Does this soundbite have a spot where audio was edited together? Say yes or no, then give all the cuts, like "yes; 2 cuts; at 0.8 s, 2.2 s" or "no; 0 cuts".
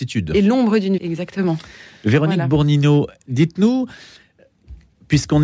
yes; 1 cut; at 1.0 s